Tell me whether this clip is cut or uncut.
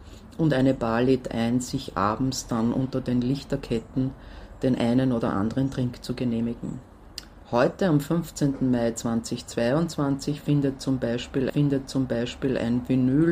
cut